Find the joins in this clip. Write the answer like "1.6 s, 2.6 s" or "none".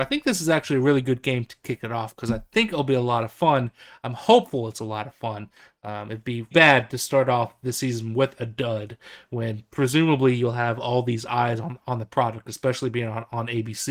6.5 s